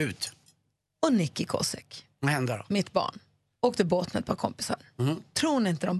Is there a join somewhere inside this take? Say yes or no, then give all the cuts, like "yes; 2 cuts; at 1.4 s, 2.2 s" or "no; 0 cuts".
no; 0 cuts